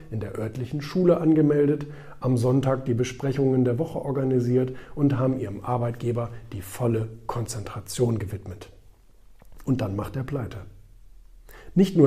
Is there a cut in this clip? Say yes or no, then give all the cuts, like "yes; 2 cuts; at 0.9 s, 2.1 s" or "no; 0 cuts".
no; 0 cuts